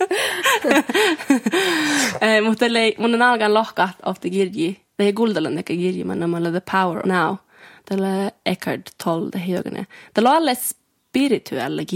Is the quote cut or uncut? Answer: cut